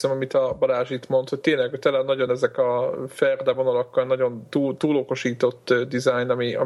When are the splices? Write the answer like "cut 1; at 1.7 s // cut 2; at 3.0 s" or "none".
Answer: none

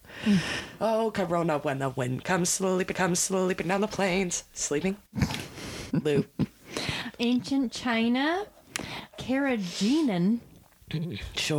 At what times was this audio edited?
cut 1; at 2.9 s // cut 2; at 5.1 s // cut 3; at 5.9 s // cut 4; at 7.2 s // cut 5; at 9.1 s

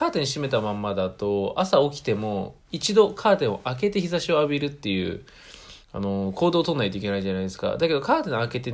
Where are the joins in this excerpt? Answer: cut 1; at 5.8 s

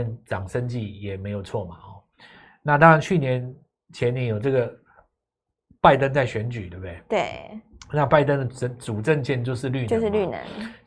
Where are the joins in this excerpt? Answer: none

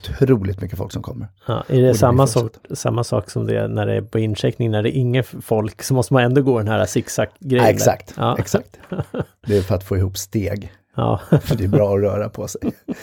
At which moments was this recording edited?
none

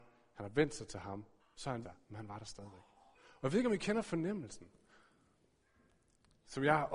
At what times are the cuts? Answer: cut 1; at 1.4 s // cut 2; at 1.8 s // cut 3; at 3.1 s

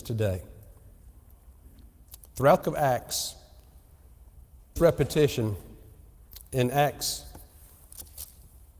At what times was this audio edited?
cut 1; at 2.6 s // cut 2; at 4.8 s

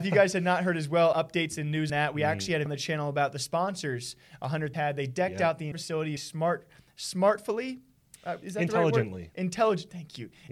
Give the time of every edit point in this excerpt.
cut 1; at 1.1 s // cut 2; at 1.9 s // cut 3; at 2.7 s // cut 4; at 4.7 s // cut 5; at 5.7 s // cut 6; at 6.2 s

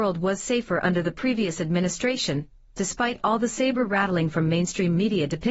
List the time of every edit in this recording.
none

